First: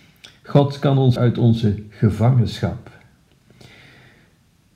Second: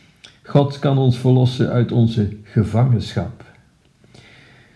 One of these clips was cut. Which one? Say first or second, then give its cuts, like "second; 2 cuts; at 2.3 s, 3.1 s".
first; 1 cut; at 1.2 s